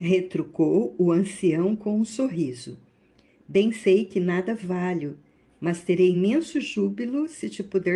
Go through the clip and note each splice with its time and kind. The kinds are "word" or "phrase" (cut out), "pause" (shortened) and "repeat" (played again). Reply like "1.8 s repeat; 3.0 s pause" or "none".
none